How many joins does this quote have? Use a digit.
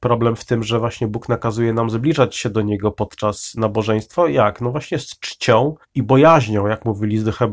1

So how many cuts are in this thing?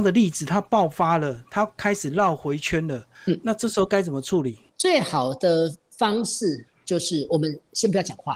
1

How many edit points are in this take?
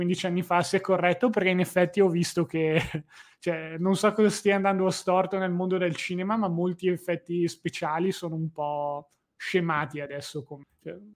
0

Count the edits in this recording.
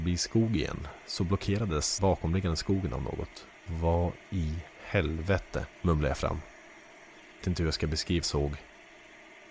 5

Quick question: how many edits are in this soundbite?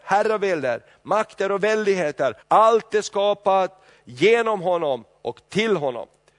1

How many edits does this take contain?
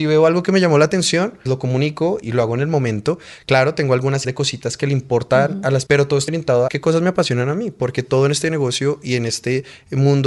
6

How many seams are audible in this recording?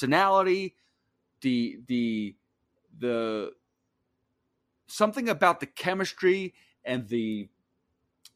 0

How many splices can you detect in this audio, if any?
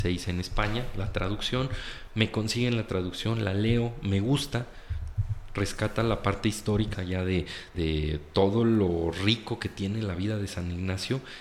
2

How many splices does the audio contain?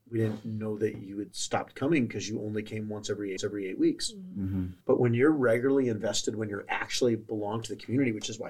2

